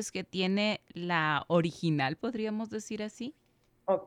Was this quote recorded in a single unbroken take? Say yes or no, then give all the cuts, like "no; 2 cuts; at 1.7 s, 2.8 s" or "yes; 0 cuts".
yes; 0 cuts